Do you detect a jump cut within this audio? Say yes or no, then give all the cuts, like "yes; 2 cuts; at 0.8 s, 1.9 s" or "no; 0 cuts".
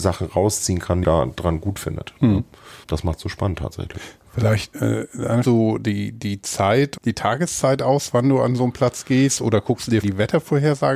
yes; 5 cuts; at 1.0 s, 2.8 s, 5.4 s, 7.0 s, 10.0 s